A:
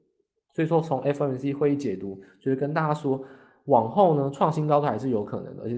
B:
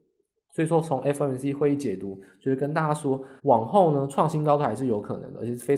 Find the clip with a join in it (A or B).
B